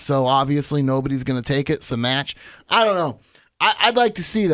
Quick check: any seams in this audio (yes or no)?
yes